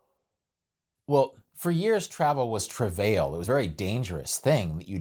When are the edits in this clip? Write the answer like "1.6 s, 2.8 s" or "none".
3.4 s